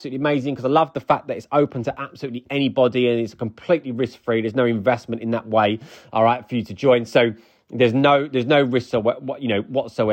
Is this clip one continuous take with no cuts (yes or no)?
yes